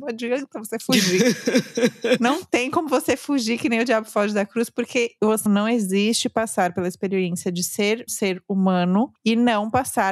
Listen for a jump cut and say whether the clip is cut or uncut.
cut